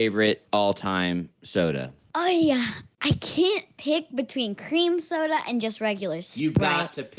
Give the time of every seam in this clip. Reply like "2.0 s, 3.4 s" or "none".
none